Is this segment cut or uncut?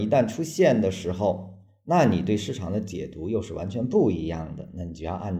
uncut